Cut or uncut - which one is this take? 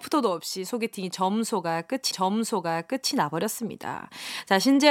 cut